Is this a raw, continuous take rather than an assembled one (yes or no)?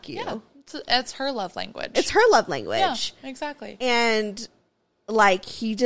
yes